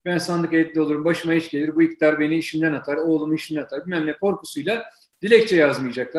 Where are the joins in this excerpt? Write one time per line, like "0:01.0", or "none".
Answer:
none